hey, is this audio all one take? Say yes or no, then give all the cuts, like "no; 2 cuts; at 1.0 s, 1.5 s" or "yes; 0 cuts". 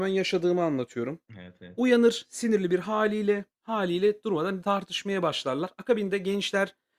no; 2 cuts; at 1.3 s, 4.6 s